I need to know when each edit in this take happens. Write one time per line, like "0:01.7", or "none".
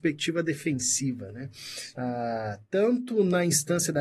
none